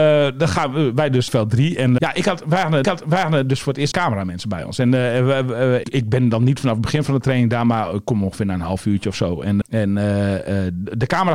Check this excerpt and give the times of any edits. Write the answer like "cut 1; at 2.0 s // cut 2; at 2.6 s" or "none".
cut 1; at 1.3 s // cut 2; at 2.0 s // cut 3; at 2.8 s // cut 4; at 3.9 s // cut 5; at 5.8 s // cut 6; at 9.6 s